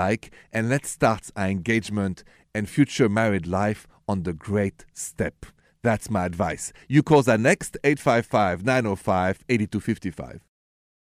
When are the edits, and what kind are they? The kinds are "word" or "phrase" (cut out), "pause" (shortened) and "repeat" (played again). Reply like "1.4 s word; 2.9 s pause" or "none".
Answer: none